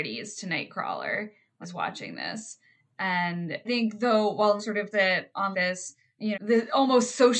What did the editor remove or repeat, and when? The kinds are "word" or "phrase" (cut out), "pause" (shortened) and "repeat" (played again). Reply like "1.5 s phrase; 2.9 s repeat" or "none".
1.6 s word; 3.6 s word; 4.6 s word; 4.9 s word; 5.5 s word; 6.3 s word